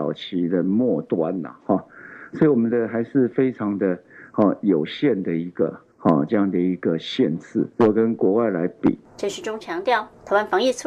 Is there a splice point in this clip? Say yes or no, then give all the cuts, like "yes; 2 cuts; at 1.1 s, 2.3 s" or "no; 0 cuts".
yes; 2 cuts; at 5.9 s, 7.7 s